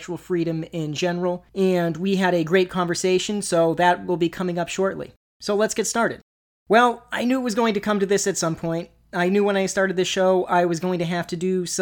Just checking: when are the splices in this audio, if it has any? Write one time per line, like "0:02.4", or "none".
none